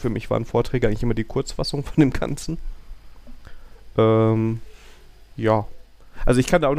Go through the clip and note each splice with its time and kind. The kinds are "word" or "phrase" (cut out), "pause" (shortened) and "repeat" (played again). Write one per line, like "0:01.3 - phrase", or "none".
none